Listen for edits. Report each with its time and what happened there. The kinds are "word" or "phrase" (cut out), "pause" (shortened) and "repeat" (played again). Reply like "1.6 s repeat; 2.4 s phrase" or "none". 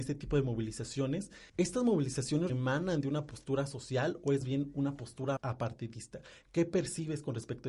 1.5 s pause; 2.5 s word; 4.4 s word; 5.4 s word